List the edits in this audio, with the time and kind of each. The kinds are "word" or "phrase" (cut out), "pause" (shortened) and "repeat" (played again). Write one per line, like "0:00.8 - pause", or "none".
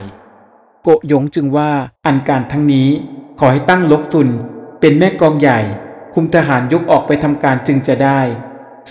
0:02.0 - pause

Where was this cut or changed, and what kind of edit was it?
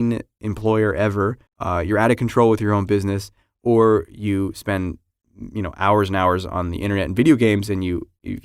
0:01.5 - pause

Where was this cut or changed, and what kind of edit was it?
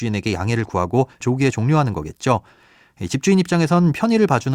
0:01.2 - word

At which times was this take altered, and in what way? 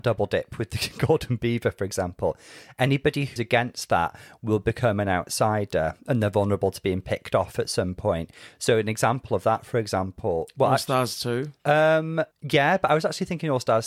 0:03.4 - word
0:11.6 - pause
0:12.3 - pause

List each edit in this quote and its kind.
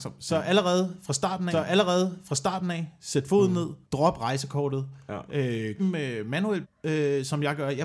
0:01.5 - repeat
0:03.8 - pause
0:05.8 - word
0:06.6 - phrase

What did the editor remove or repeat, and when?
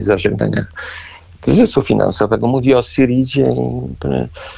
none

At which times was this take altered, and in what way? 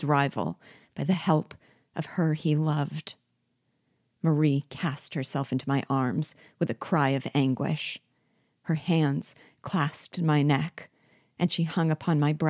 none

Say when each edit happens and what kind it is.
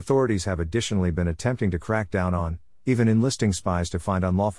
none

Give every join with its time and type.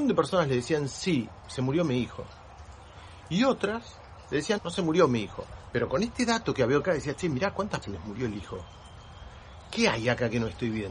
0:04.6 - word
0:06.8 - word
0:07.8 - word

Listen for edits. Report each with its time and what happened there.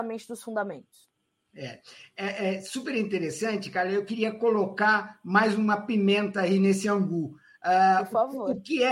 none

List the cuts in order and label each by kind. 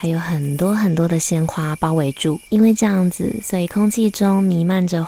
0:02.5 - pause

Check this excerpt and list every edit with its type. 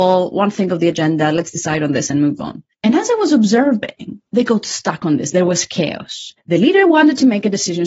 0:02.7 - pause
0:04.3 - pause
0:06.4 - pause

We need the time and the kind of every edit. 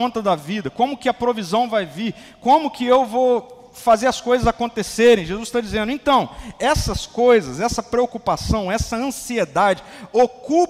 none

